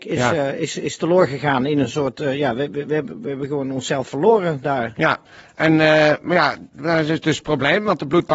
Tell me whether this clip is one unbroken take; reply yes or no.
no